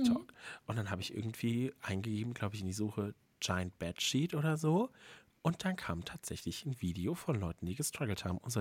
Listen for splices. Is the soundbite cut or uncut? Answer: uncut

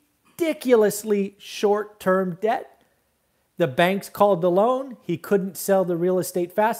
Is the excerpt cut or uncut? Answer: uncut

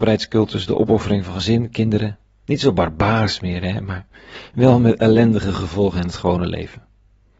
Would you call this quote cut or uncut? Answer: uncut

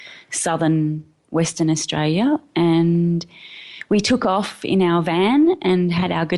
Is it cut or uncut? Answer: uncut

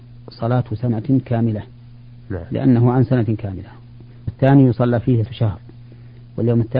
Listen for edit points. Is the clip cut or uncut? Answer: cut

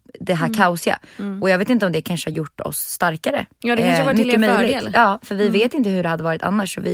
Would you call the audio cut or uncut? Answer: uncut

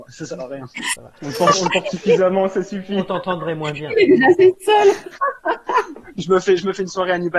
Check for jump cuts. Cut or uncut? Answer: uncut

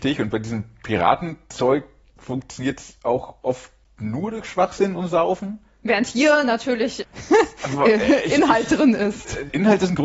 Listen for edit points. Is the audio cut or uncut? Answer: uncut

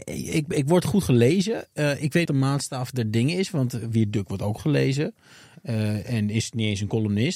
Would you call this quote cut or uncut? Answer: cut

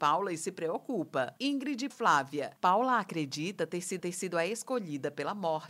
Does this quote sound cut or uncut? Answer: cut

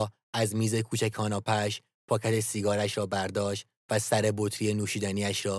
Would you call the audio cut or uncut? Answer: cut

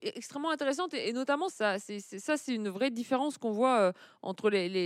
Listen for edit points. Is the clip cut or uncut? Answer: cut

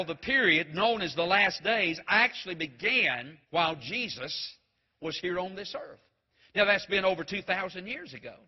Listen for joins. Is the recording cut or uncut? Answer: cut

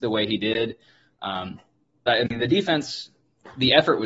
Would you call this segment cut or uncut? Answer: cut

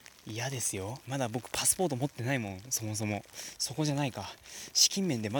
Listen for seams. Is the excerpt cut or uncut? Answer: cut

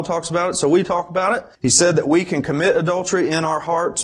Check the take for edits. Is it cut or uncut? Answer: cut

